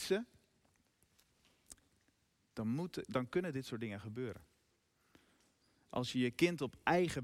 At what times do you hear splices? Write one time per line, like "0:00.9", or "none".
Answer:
none

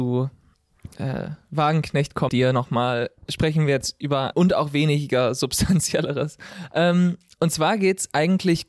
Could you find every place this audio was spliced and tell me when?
0:02.3
0:04.3

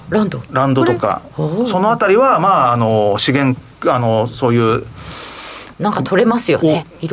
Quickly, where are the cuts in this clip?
0:05.7

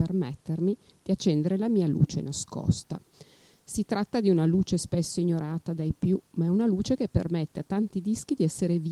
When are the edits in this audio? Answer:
none

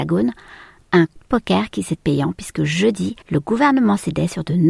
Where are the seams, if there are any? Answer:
0:01.2
0:02.0
0:03.2

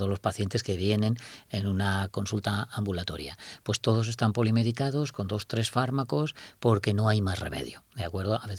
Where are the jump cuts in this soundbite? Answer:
none

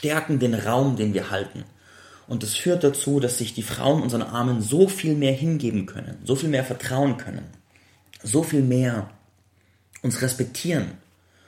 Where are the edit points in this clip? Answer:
none

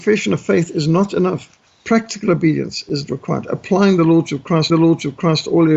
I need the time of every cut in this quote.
0:01.7
0:04.7

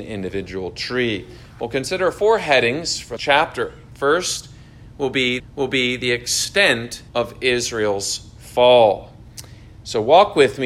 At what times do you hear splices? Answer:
0:03.2
0:05.4
0:07.1

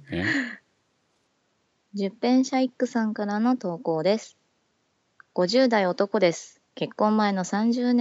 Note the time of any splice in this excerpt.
0:06.7

